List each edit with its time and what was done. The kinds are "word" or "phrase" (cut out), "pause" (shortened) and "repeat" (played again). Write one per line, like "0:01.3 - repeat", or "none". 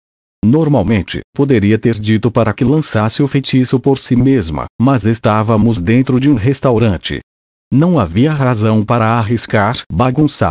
none

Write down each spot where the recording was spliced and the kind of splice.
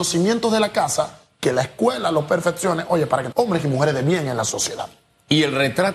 0:03.3 - word

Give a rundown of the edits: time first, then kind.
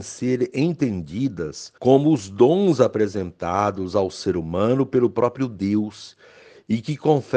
0:01.8 - pause

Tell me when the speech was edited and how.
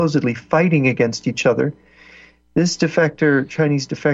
none

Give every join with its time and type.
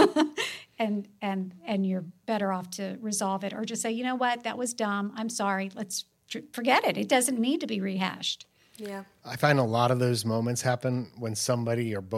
none

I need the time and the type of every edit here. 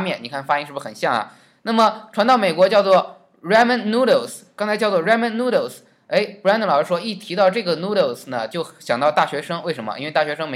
none

